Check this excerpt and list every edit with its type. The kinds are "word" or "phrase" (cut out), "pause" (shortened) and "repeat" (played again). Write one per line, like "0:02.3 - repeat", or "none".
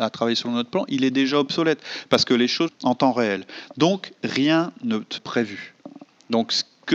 0:02.7 - word
0:05.2 - phrase